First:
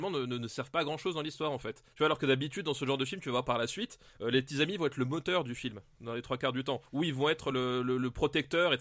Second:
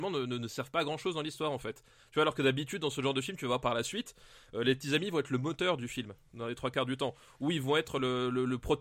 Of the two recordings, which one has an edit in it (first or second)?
first